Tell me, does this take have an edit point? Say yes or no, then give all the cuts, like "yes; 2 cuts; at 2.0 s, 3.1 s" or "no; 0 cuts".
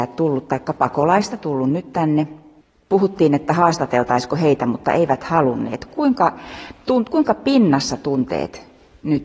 yes; 1 cut; at 2.6 s